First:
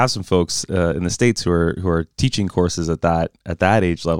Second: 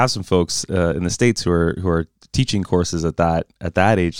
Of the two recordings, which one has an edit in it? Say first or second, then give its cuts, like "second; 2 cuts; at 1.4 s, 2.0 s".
first; 1 cut; at 2.1 s